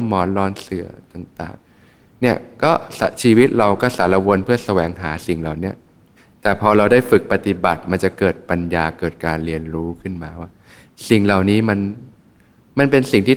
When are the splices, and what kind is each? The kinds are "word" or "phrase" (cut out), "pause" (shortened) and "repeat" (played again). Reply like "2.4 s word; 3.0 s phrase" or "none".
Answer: 1.6 s pause; 6.2 s pause